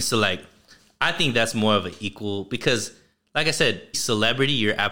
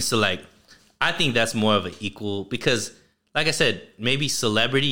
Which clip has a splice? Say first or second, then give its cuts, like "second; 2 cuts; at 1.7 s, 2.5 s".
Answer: first; 1 cut; at 3.9 s